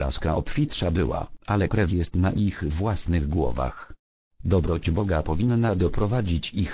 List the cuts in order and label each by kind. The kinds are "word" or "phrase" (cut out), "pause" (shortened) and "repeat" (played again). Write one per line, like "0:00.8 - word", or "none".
0:01.4 - pause
0:01.9 - word